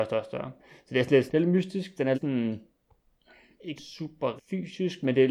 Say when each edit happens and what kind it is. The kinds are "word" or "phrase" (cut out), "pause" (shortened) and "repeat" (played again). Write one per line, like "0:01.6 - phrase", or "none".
0:01.3 - word
0:02.1 - word
0:03.8 - word
0:04.4 - word